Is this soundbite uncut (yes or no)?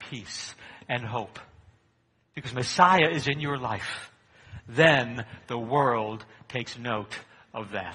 yes